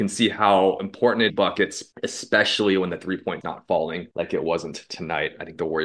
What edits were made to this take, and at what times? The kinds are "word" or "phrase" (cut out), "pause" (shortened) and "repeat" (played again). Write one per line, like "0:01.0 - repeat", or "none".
0:01.3 - phrase
0:01.9 - pause
0:03.4 - word
0:04.1 - pause